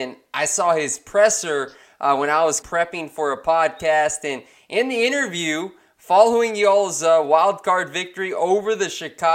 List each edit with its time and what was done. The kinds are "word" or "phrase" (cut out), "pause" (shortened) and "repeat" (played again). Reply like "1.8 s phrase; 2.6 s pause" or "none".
none